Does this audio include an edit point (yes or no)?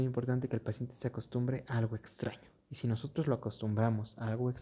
no